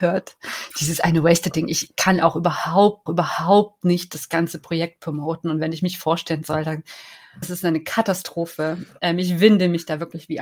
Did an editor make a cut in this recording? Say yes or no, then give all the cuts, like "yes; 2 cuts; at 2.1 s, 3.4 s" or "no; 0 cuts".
yes; 2 cuts; at 3.1 s, 7.4 s